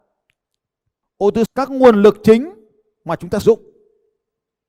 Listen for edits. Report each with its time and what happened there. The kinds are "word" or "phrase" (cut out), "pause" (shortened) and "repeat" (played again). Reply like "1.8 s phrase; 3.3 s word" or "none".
1.5 s word; 3.4 s word